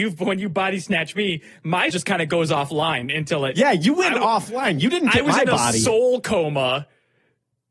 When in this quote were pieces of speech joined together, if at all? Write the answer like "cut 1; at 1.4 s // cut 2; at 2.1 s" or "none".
cut 1; at 1.9 s